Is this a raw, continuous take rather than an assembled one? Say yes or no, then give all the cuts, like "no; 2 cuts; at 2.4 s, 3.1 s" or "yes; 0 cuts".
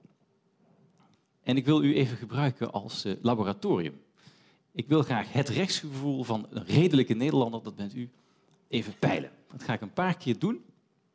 yes; 0 cuts